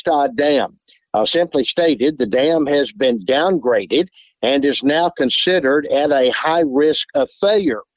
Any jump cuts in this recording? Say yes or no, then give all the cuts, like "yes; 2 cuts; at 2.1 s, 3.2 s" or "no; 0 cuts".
no; 0 cuts